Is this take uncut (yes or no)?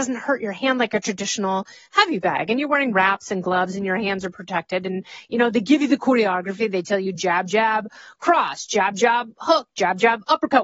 yes